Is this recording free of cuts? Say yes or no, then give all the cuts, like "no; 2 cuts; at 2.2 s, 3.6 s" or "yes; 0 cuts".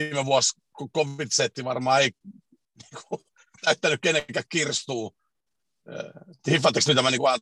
yes; 0 cuts